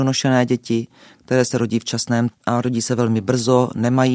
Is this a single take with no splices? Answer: no; 1 cut; at 2.3 s

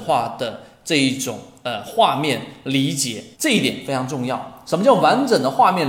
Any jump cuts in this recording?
yes; 1 cut; at 3.3 s

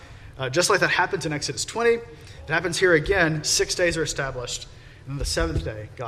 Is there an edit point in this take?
no; 0 cuts

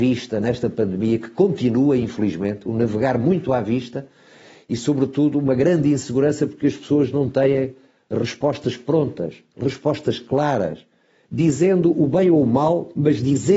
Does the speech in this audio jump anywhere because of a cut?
no; 0 cuts

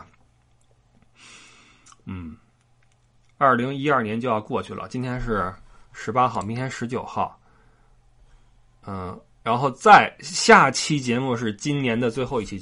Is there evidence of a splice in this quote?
no; 0 cuts

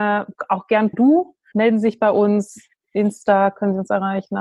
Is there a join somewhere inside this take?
yes; 2 cuts; at 0.9 s, 1.5 s

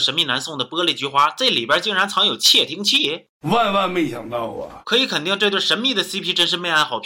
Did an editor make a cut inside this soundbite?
no; 0 cuts

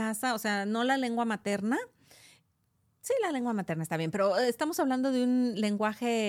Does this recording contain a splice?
no; 0 cuts

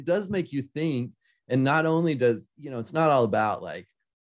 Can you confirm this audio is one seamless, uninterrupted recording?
yes; 0 cuts

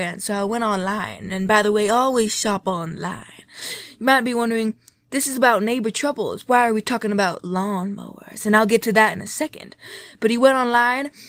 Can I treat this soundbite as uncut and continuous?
yes; 0 cuts

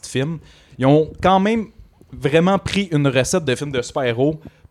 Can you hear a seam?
no; 0 cuts

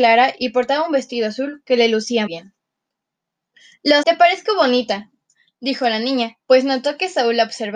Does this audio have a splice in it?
yes; 3 cuts; at 2.3 s, 4.0 s, 6.4 s

